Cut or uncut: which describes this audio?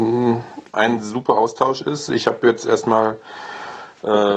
uncut